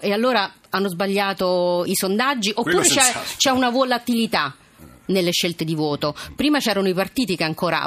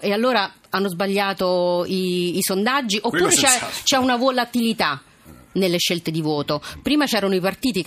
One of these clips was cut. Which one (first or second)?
first